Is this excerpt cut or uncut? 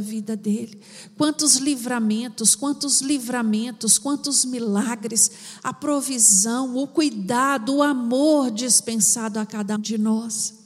cut